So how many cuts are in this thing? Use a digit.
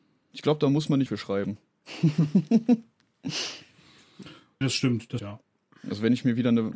3